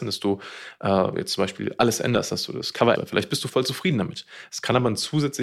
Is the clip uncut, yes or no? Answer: no